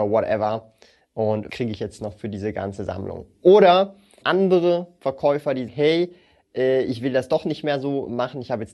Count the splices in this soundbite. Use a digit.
3